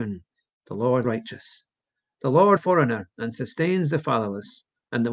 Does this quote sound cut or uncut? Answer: cut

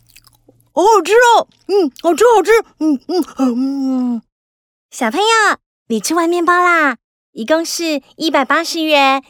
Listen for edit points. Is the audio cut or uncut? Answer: uncut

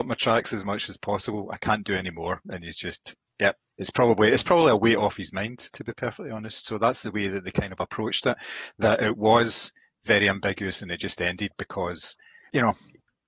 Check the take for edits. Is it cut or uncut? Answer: uncut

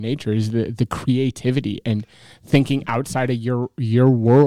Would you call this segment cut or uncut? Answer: uncut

